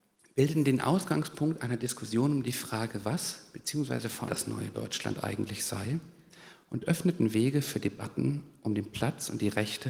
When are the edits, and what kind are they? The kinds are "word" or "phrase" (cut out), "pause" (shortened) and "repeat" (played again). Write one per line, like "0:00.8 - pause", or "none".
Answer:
0:04.3 - phrase